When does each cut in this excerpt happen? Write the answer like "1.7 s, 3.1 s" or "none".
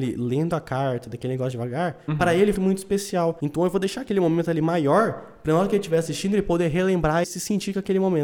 1.5 s, 2.5 s, 7.2 s